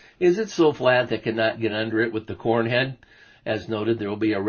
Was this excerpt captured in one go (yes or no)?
yes